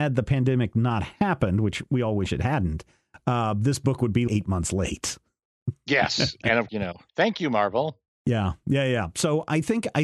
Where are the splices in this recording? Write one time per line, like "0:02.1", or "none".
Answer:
0:04.3
0:06.7
0:07.1